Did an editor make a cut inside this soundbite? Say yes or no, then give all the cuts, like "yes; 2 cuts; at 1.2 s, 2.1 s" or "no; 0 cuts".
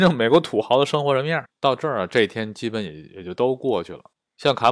no; 0 cuts